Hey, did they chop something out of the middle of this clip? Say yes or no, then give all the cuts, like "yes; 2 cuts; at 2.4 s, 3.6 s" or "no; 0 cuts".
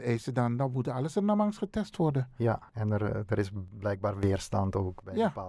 yes; 1 cut; at 2.7 s